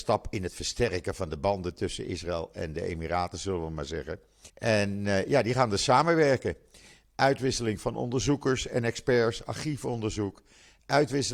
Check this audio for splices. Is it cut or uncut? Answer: cut